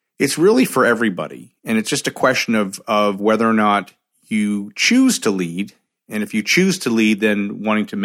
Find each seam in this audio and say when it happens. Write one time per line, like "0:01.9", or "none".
none